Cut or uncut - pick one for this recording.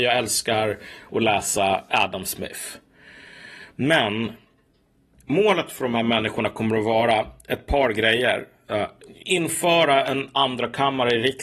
uncut